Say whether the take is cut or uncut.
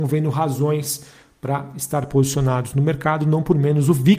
uncut